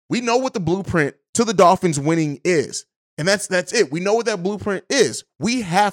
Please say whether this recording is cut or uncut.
uncut